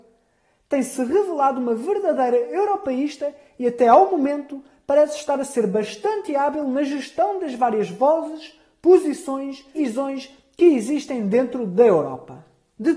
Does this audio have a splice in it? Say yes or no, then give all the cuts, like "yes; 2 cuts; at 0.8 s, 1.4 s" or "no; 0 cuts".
yes; 1 cut; at 9.7 s